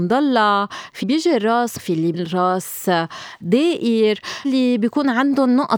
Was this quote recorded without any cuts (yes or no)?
no